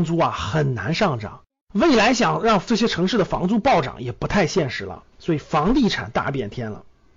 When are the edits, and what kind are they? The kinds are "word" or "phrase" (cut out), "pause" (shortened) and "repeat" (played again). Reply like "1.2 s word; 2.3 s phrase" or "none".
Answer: 1.5 s pause; 5.1 s pause